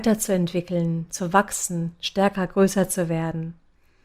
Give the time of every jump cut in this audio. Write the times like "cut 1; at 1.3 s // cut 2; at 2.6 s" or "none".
none